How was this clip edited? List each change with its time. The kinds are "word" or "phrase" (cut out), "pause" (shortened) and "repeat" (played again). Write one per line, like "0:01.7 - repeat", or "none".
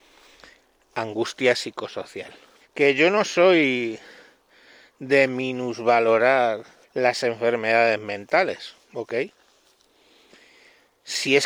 0:02.6 - pause
0:06.8 - pause
0:08.8 - pause

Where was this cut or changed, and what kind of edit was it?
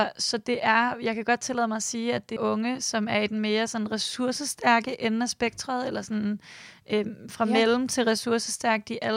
0:02.4 - word

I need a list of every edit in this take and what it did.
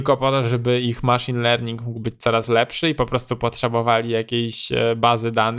none

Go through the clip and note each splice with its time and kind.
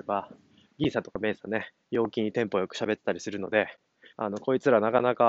0:01.8 - pause
0:04.1 - pause

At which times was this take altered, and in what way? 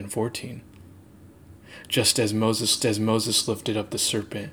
0:02.8 - repeat

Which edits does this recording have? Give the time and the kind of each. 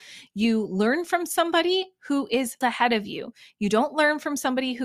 0:02.6 - word

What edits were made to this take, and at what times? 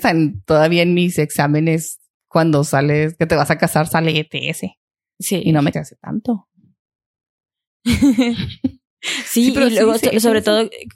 0:05.7 - word

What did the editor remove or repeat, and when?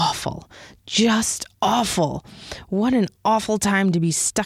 0:01.5 - pause

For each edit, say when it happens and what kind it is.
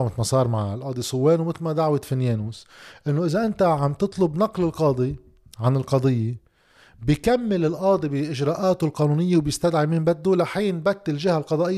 none

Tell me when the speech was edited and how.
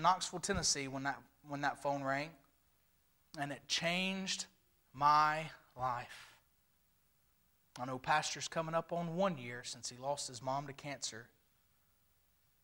none

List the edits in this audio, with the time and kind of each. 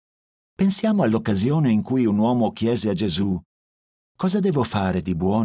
none

